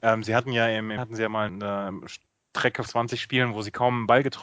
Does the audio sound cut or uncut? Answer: cut